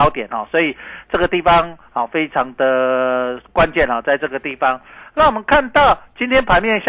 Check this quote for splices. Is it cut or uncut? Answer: uncut